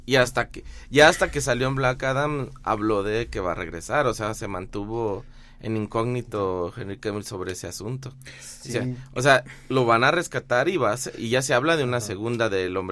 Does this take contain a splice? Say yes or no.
no